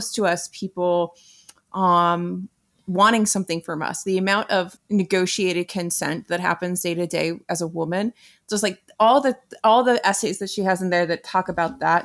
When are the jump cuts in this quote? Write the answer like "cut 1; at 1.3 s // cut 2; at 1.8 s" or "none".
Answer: cut 1; at 4.8 s